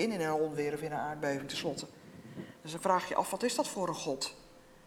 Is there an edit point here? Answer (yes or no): no